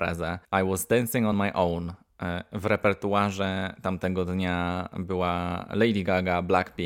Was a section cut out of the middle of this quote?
no; 0 cuts

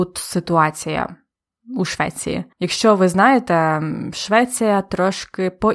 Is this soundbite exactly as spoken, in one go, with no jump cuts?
no; 1 cut; at 2.5 s

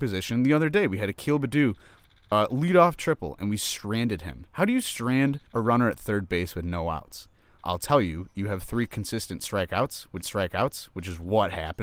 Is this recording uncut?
no; 3 cuts; at 5.5 s, 7.6 s, 10.2 s

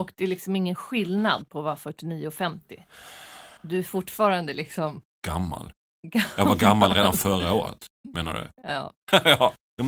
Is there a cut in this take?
yes; 1 cut; at 3.6 s

